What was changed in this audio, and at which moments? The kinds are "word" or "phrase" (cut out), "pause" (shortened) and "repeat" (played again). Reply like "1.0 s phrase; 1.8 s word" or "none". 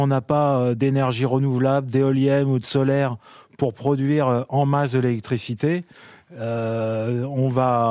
none